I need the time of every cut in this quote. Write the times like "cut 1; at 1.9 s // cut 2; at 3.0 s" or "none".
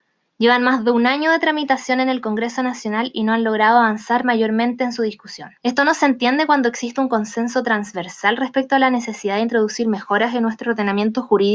cut 1; at 5.6 s